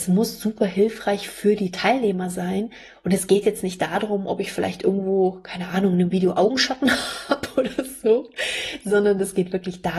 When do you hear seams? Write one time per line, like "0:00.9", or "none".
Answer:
none